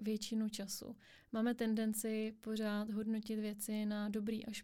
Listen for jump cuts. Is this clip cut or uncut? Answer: uncut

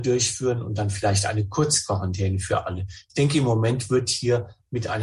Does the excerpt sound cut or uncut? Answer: uncut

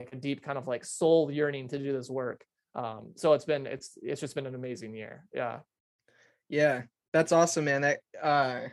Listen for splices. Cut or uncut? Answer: uncut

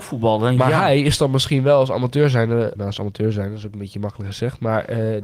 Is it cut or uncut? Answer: cut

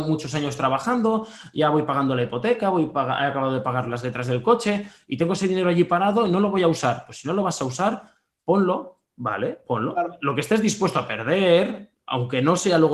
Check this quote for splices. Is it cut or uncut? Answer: cut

